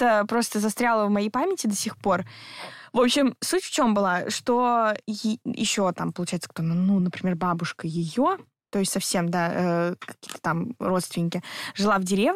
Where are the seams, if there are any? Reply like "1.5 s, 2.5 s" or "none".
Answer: none